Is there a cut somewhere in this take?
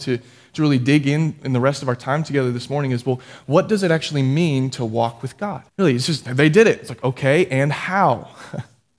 yes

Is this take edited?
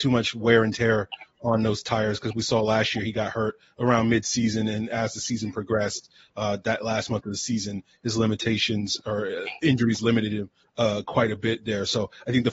no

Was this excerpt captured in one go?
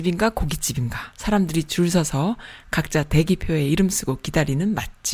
no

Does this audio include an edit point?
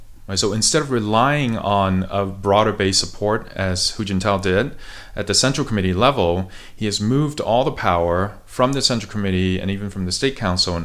no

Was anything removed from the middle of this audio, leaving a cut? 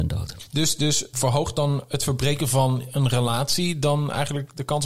yes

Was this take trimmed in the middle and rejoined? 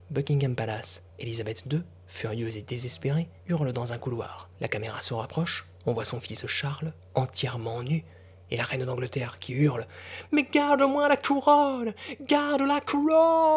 yes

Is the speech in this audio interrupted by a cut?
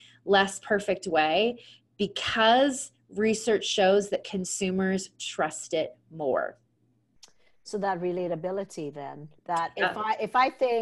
yes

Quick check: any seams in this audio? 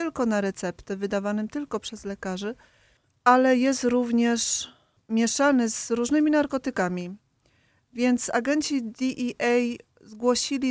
no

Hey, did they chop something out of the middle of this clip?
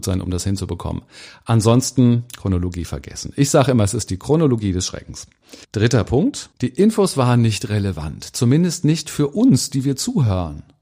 yes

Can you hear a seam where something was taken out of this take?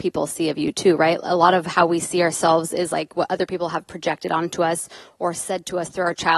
no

